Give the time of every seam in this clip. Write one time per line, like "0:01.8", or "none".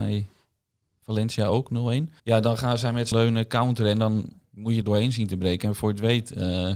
0:02.2
0:03.1
0:04.8